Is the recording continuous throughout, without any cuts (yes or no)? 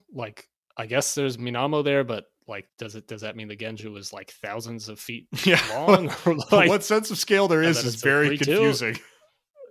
yes